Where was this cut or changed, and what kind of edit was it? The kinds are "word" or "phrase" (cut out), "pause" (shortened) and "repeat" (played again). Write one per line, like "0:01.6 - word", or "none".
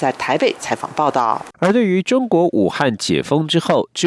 0:01.5 - pause

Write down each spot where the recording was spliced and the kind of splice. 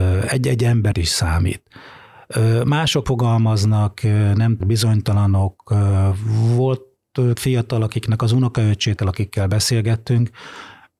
0:00.9 - word
0:03.0 - word
0:04.6 - word
0:07.3 - word
0:09.0 - word

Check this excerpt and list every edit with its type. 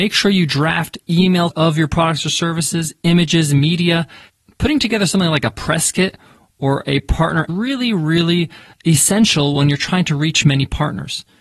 0:01.5 - phrase
0:07.5 - phrase

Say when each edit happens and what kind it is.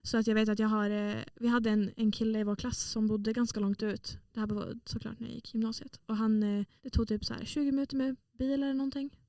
0:06.8 - pause

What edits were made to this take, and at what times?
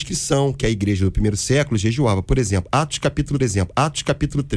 0:03.4 - repeat

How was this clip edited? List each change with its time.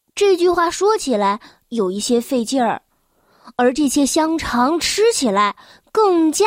none

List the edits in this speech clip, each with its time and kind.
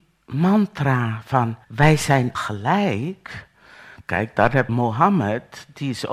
0:01.6 - pause
0:02.3 - word
0:04.7 - word

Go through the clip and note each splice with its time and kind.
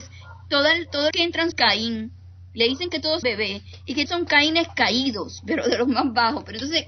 0:01.1 - word
0:01.5 - word
0:03.2 - word
0:04.1 - word

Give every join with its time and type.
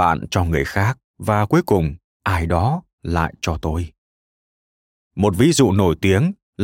none

